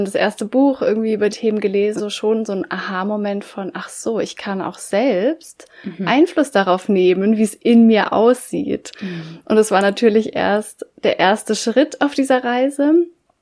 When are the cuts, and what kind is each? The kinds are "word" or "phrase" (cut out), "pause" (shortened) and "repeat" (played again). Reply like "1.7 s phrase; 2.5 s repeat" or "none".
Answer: 1.3 s word; 2.0 s phrase; 10.9 s pause